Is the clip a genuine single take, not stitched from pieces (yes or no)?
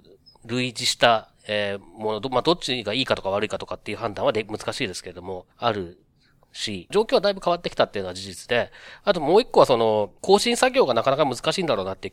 no